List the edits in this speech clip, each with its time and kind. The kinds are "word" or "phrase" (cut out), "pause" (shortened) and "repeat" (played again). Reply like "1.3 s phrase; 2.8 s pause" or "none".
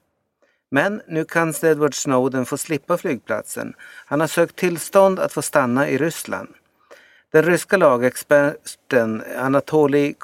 none